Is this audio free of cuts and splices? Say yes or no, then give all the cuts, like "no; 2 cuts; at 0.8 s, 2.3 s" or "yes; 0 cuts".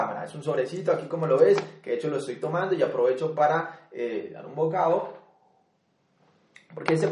yes; 0 cuts